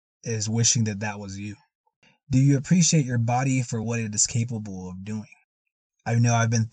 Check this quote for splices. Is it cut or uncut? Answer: uncut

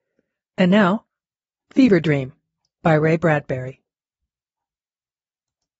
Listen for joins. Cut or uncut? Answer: uncut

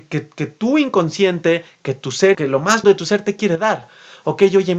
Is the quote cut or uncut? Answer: cut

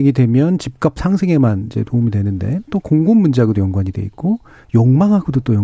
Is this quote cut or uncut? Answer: uncut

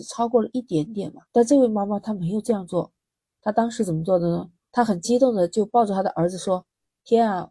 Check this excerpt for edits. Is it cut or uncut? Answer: cut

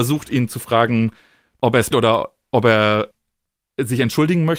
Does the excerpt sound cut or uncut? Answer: cut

